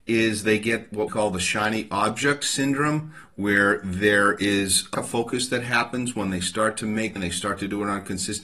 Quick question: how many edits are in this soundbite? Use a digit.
3